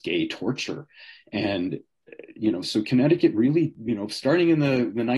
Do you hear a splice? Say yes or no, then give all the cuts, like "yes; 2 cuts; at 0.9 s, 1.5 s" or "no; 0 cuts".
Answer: no; 0 cuts